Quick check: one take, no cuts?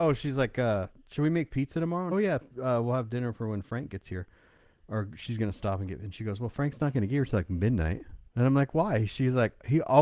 no; 2 cuts; at 2.1 s, 8.3 s

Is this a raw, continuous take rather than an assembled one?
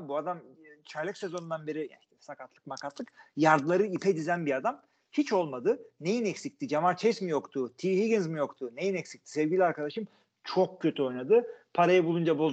yes; 0 cuts

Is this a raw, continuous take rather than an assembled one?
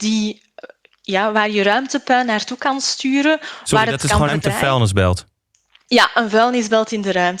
no; 1 cut; at 4.3 s

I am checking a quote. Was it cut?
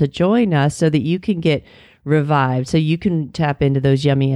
no; 0 cuts

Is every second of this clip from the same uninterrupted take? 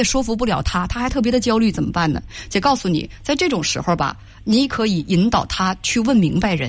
yes; 0 cuts

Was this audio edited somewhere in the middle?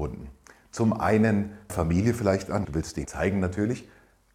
yes; 3 cuts; at 1.7 s, 2.6 s, 3.0 s

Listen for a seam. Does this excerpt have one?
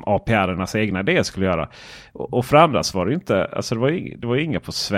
no; 0 cuts

